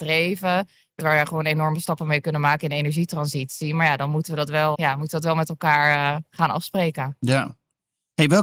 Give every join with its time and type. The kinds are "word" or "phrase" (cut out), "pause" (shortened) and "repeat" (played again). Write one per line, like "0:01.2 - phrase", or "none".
0:01.0 - word
0:04.7 - word

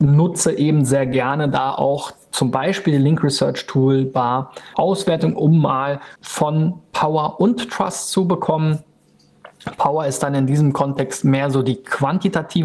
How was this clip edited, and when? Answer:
0:04.7 - phrase
0:06.2 - phrase

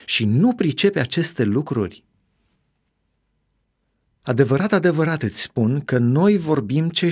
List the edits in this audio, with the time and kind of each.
none

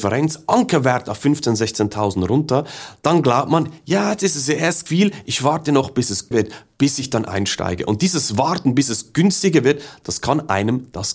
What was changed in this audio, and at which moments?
0:04.9 - word
0:06.3 - word

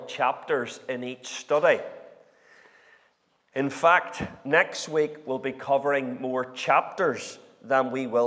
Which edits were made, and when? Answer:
none

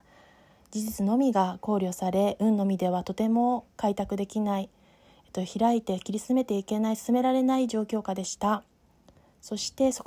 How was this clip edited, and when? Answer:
none

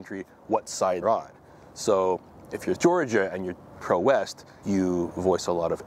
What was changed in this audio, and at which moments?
0:01.0 - word
0:02.7 - word
0:03.8 - word
0:04.6 - word

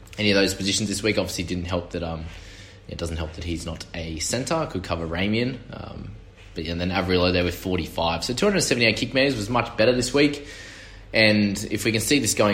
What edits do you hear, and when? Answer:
none

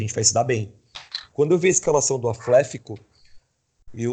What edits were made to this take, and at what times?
none

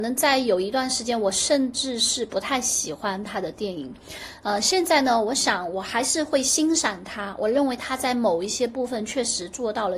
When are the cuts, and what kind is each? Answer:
none

